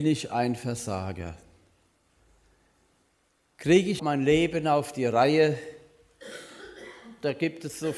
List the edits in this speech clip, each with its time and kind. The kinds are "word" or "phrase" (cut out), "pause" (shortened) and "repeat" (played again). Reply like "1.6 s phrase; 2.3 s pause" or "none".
4.0 s word